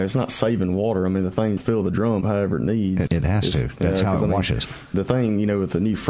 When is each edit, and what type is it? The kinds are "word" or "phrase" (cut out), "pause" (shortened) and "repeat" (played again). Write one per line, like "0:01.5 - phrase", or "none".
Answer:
0:01.6 - word
0:02.2 - word
0:03.1 - word